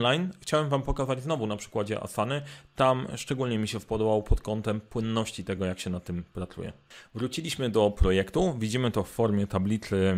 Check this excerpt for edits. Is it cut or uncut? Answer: uncut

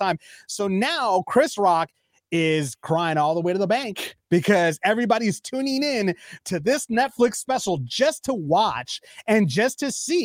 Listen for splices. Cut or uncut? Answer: uncut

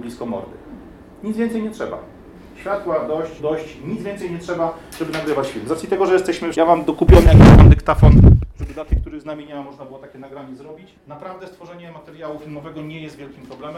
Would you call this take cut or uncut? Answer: cut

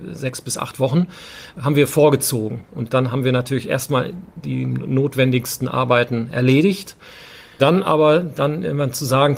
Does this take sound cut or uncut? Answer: cut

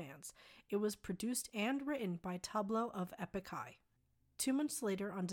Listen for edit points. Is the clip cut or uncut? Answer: uncut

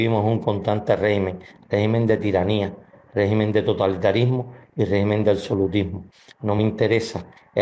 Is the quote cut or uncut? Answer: uncut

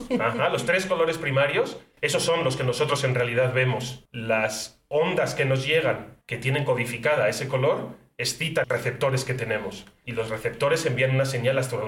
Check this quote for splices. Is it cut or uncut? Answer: cut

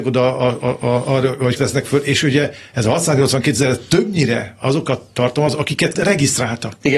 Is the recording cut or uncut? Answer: cut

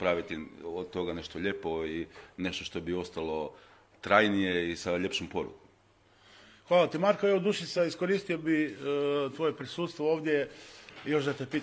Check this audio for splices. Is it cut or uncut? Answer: uncut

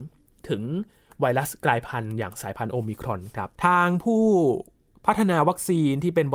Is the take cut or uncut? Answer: cut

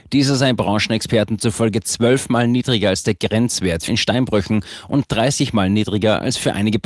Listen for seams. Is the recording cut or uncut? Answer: cut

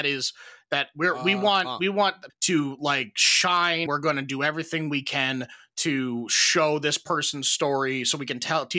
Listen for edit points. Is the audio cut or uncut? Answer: cut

